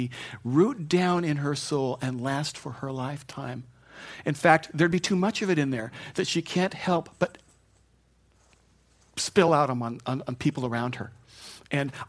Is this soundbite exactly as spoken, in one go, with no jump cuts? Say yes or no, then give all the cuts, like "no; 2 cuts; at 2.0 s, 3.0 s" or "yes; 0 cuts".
yes; 0 cuts